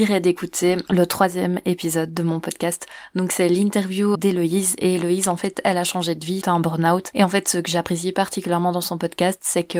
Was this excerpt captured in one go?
no; 2 cuts; at 4.1 s, 6.4 s

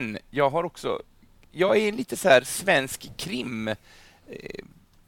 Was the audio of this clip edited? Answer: no; 0 cuts

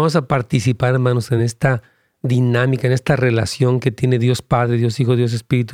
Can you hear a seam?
no; 0 cuts

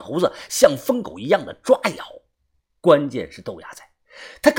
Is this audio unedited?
yes; 0 cuts

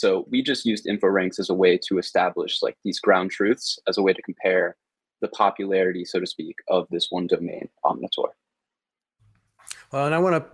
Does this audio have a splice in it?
no; 0 cuts

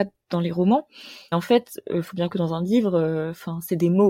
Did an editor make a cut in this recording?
yes; 2 cuts; at 1.3 s, 2.3 s

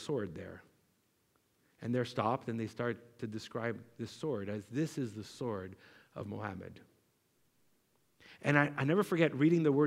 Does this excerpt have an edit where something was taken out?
no; 0 cuts

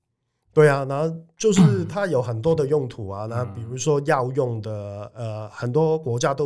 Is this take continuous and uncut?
yes; 0 cuts

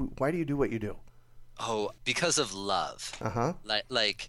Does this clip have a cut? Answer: yes; 1 cut; at 2.0 s

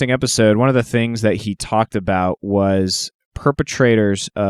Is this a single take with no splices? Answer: yes; 0 cuts

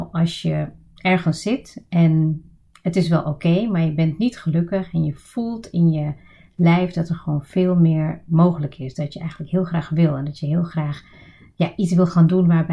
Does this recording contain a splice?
no; 0 cuts

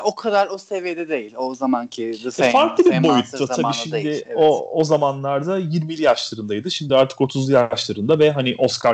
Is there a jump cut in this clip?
no; 0 cuts

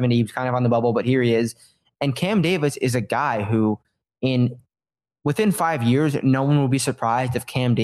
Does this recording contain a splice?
no; 0 cuts

